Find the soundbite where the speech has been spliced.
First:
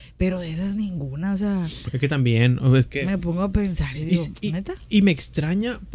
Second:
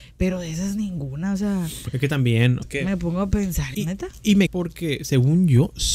second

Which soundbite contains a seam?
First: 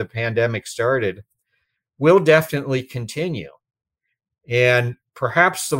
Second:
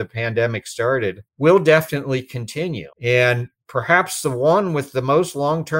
second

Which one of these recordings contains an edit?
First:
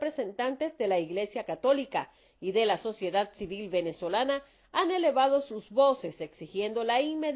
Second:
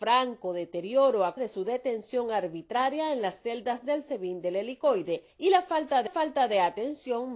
second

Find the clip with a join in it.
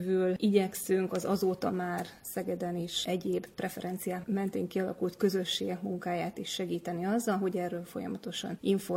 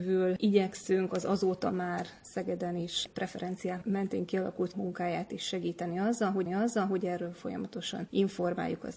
second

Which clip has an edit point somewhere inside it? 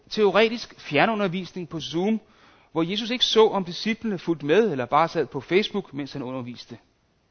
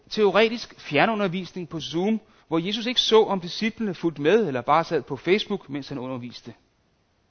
second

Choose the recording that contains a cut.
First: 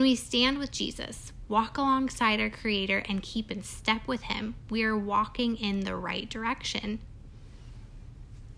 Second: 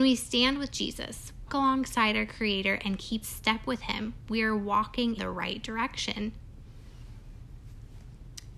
second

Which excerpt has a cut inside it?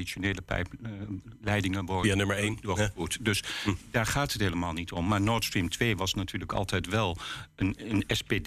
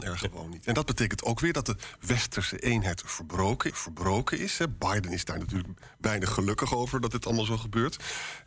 second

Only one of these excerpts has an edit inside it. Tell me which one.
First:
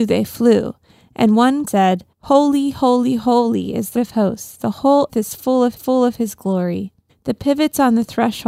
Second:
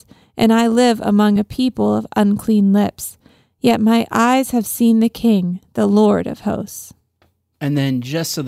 first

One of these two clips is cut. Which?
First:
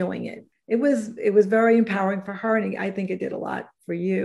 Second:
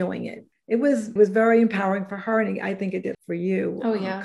second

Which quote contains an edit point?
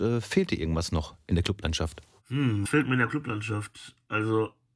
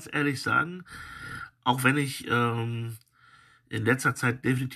first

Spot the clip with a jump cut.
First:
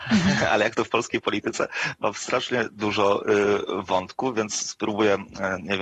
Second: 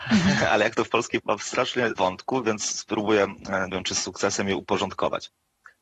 second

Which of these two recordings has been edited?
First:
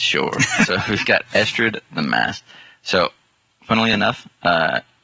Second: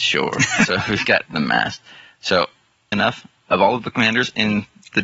second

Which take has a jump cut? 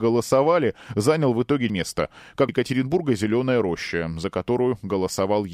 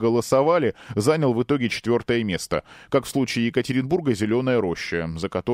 first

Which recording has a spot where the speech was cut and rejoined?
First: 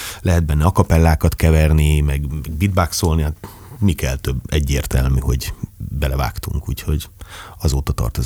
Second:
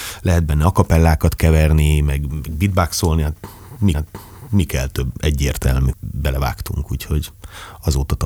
second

